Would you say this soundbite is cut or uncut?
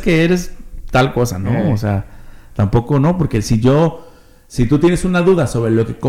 uncut